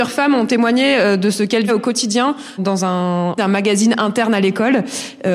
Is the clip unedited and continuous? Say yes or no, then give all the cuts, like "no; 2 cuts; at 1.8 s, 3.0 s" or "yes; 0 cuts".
no; 3 cuts; at 1.7 s, 2.6 s, 3.4 s